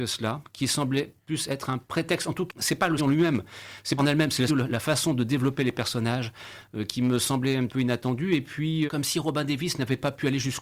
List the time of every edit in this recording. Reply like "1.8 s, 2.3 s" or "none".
2.5 s, 3.0 s, 4.0 s, 4.5 s, 7.7 s, 8.9 s

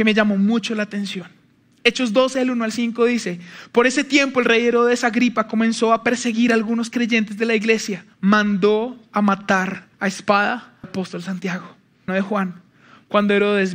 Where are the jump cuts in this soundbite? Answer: 8.1 s, 9.9 s, 10.8 s, 12.1 s

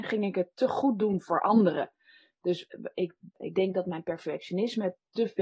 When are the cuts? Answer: none

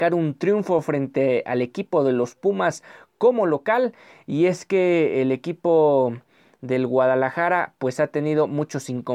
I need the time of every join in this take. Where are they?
none

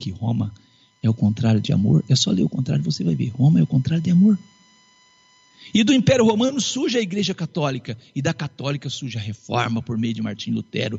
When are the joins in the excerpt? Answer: none

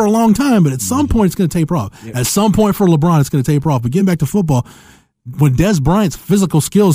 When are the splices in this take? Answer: none

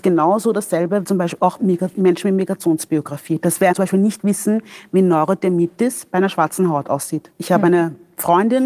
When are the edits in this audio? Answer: 1.0 s, 1.6 s, 3.7 s

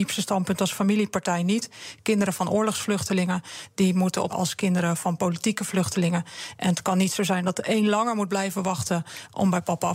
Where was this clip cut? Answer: 4.3 s

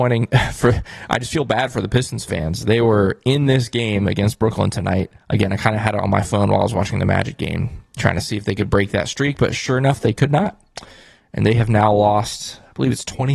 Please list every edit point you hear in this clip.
5.2 s

